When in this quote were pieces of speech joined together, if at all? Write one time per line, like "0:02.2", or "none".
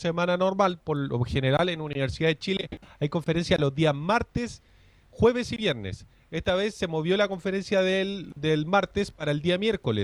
none